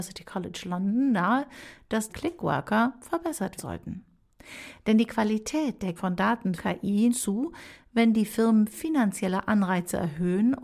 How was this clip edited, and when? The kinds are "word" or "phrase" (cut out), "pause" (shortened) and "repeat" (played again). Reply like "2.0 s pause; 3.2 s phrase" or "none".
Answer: 2.1 s phrase; 3.6 s word; 6.0 s word; 6.6 s word; 7.1 s word